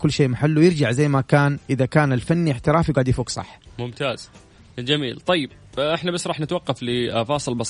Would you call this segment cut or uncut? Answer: uncut